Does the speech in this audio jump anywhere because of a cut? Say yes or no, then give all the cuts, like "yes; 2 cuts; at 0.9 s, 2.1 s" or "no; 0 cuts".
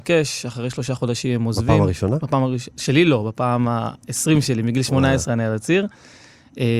no; 0 cuts